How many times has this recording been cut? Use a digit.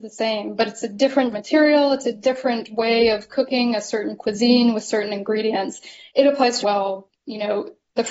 3